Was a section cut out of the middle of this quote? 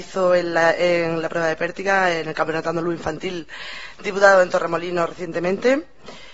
no; 0 cuts

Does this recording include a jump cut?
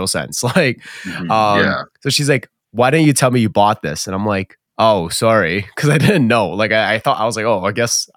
yes; 1 cut; at 4.7 s

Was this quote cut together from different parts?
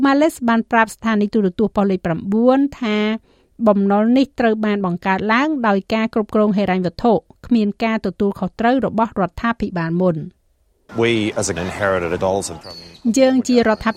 yes; 4 cuts; at 10.9 s, 11.6 s, 12.2 s, 12.6 s

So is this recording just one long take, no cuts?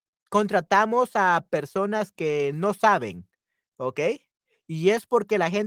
yes; 0 cuts

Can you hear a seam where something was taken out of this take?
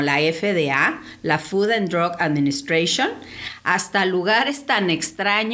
no; 0 cuts

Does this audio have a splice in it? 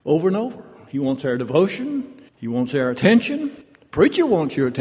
yes; 2 cuts; at 2.3 s, 3.6 s

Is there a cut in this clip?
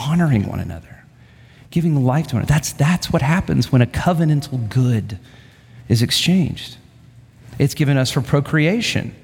no; 0 cuts

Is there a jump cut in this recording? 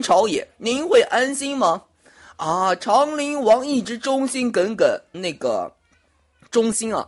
yes; 1 cut; at 5.1 s

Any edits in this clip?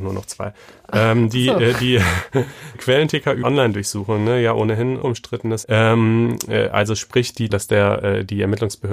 yes; 5 cuts; at 2.7 s, 3.4 s, 5.0 s, 5.6 s, 7.5 s

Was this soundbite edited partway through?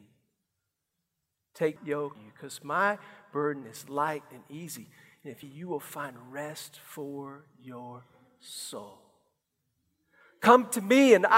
yes; 3 cuts; at 1.8 s, 2.2 s, 5.4 s

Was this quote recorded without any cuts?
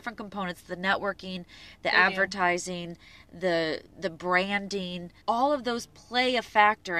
no; 1 cut; at 5.2 s

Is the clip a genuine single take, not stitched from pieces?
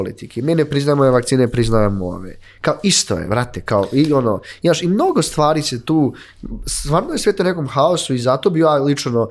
yes; 0 cuts

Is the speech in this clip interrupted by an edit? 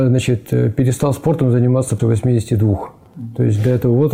yes; 1 cut; at 2.0 s

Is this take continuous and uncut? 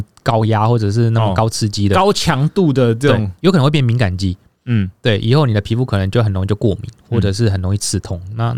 yes; 0 cuts

